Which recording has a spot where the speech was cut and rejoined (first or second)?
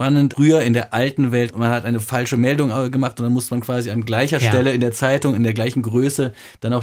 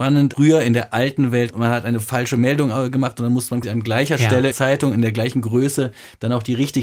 second